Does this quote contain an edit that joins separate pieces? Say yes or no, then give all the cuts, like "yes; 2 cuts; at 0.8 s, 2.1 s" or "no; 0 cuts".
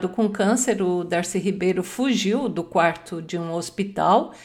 no; 0 cuts